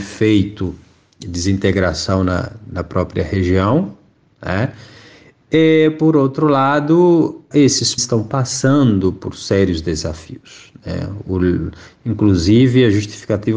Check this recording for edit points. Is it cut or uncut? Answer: cut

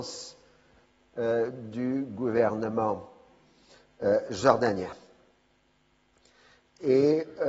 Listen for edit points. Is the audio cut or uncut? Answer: uncut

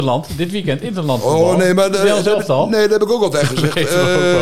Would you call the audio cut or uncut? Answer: uncut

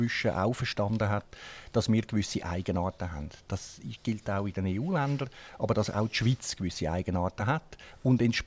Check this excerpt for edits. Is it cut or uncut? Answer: uncut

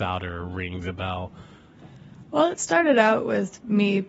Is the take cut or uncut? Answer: uncut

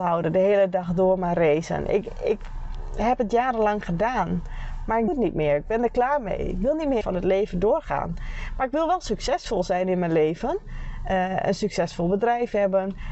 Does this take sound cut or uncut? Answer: cut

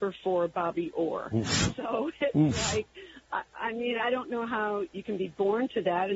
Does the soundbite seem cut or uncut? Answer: uncut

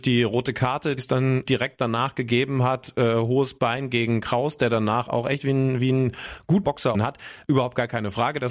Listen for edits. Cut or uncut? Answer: cut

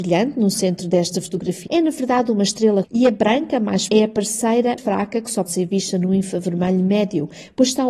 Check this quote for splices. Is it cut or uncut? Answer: cut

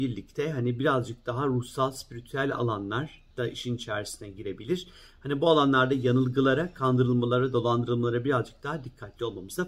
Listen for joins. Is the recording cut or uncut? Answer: uncut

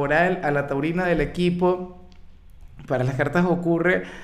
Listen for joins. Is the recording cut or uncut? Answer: uncut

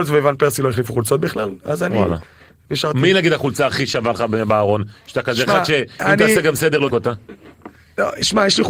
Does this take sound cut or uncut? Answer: cut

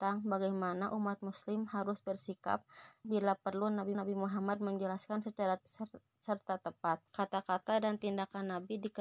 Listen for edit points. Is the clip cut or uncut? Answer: cut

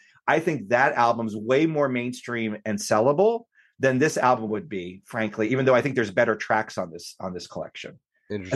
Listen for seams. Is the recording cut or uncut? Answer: uncut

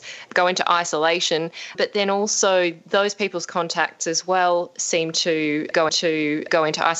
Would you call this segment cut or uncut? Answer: cut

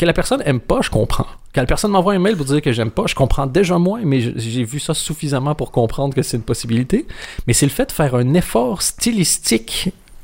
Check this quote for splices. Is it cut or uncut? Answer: uncut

